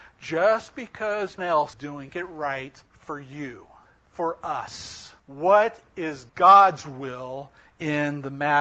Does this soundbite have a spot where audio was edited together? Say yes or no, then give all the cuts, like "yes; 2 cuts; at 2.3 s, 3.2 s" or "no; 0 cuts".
yes; 7 cuts; at 1.4 s, 1.7 s, 2.1 s, 2.9 s, 3.9 s, 5.2 s, 6.3 s